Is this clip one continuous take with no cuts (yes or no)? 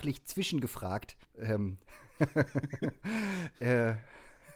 no